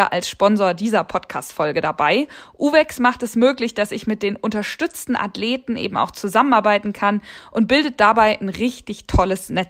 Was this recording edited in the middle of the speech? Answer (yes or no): no